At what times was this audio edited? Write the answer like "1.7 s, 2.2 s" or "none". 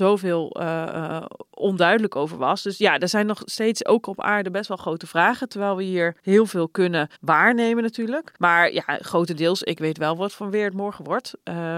6.2 s, 7.2 s, 8.4 s